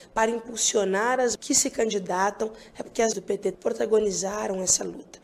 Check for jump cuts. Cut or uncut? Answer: cut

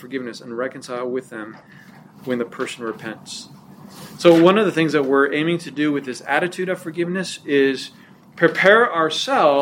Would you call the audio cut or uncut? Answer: uncut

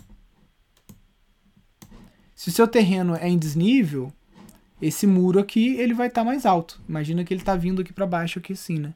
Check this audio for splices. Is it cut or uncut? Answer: uncut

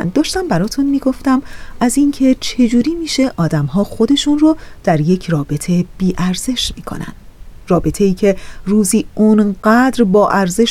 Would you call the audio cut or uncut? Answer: uncut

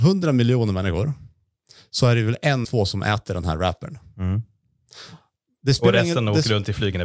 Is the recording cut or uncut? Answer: cut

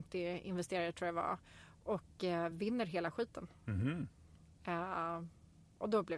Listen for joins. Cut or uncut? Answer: uncut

